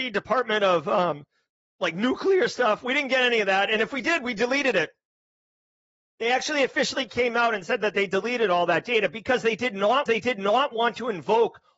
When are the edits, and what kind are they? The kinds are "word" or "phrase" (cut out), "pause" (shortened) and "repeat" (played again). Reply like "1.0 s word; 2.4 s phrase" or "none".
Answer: 10.1 s repeat